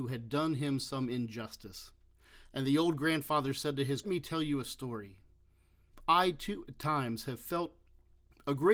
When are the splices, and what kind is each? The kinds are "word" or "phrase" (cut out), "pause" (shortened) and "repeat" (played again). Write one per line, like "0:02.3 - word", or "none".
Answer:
0:04.0 - phrase